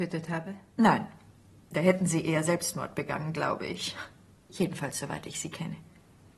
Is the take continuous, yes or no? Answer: yes